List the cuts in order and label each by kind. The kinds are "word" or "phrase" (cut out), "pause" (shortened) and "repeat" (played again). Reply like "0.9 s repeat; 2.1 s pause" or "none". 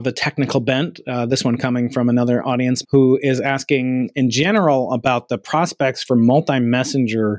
2.8 s word